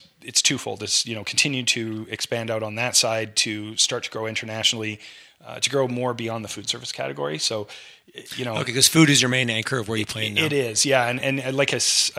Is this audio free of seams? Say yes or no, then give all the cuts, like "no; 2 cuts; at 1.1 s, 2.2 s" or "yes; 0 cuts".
yes; 0 cuts